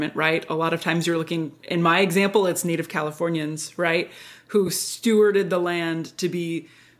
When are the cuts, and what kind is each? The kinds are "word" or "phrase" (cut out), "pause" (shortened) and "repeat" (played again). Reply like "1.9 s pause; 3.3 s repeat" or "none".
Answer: none